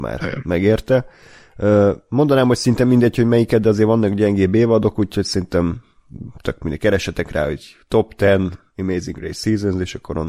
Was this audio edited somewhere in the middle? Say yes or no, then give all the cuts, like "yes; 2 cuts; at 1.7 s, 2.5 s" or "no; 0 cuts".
no; 0 cuts